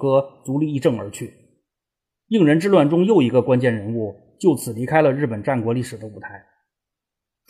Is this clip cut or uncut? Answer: uncut